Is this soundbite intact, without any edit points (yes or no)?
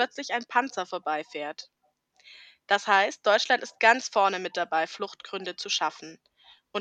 yes